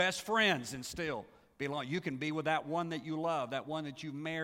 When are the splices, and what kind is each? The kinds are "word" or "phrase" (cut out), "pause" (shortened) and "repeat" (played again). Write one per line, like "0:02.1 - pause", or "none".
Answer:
none